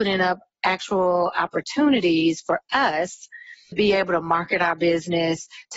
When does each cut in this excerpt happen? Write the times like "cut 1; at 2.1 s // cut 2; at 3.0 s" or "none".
cut 1; at 3.7 s